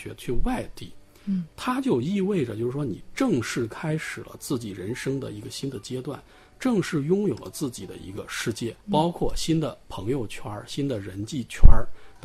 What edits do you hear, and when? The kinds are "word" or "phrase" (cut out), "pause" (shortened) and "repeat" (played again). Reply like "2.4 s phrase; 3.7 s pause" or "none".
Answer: 8.8 s pause